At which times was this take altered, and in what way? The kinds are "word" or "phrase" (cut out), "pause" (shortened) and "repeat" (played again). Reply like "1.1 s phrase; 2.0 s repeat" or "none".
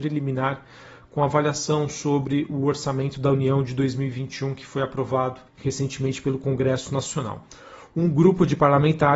5.5 s pause